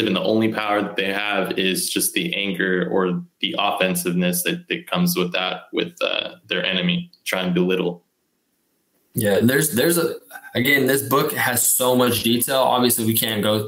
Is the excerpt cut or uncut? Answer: uncut